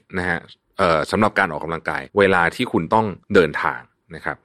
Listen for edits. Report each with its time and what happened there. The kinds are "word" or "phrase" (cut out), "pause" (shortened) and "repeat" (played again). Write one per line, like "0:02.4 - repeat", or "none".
0:02.1 - pause
0:03.2 - pause